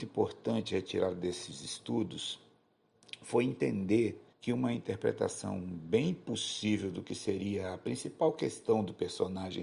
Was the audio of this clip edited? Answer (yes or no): yes